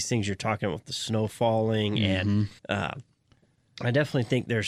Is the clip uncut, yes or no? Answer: no